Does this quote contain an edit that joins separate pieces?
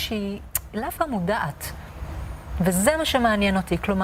yes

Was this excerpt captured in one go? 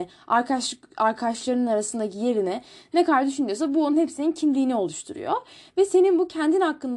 yes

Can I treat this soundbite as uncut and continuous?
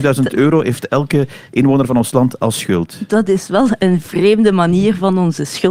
yes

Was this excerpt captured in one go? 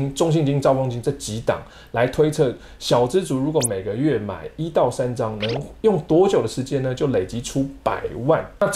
yes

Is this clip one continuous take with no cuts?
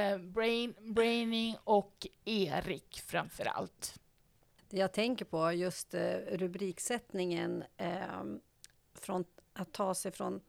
yes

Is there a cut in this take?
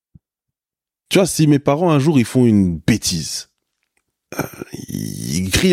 no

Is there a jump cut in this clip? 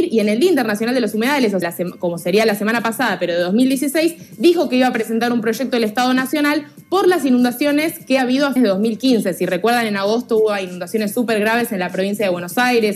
yes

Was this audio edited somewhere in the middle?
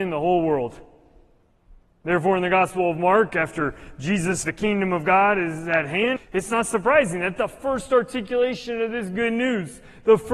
yes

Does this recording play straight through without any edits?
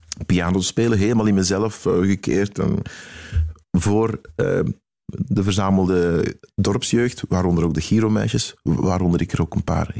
no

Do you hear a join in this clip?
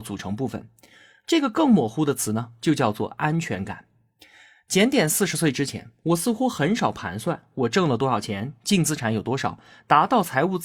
no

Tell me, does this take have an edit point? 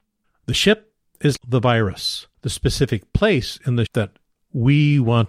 yes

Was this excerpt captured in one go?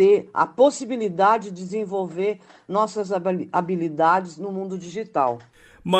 yes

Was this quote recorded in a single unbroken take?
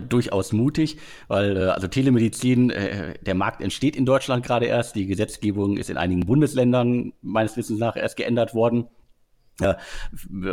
yes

